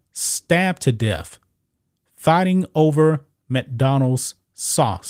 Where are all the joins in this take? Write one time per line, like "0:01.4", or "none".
none

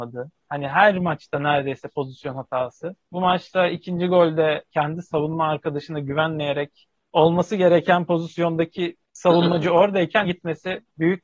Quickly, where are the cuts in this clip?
0:04.6
0:07.1
0:10.2

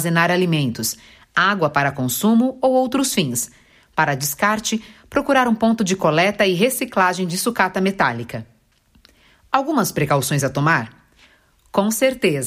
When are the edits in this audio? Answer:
none

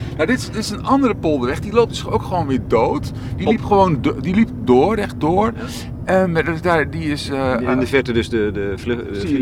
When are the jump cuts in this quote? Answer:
none

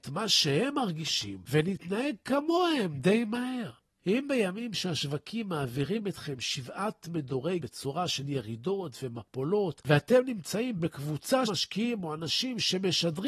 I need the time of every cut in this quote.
0:07.6
0:11.4

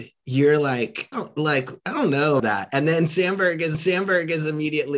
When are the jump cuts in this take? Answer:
0:01.1
0:01.8
0:02.4
0:03.7

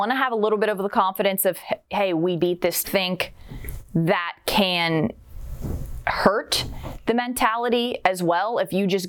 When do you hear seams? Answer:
0:02.4
0:02.8

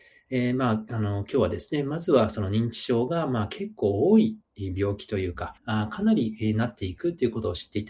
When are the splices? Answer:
0:05.6

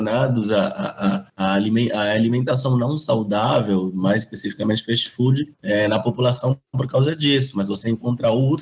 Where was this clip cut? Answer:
0:01.3
0:05.5

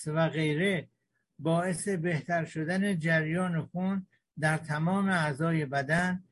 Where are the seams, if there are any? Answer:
none

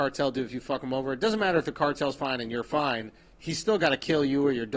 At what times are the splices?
none

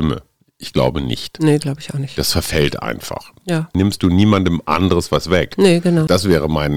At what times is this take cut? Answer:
0:03.7

